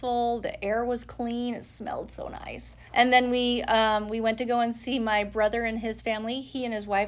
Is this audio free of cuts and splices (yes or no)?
no